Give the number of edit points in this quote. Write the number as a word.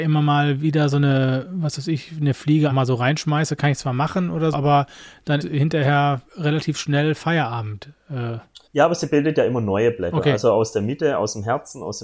five